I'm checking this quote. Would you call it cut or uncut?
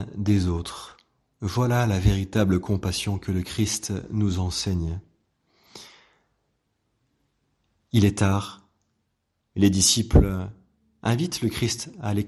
uncut